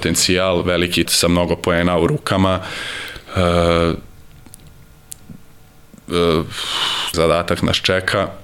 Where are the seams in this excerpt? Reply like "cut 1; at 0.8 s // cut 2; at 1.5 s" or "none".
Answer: cut 1; at 1.1 s // cut 2; at 7.1 s